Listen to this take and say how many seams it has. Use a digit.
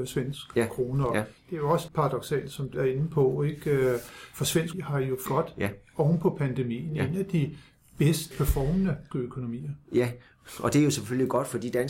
7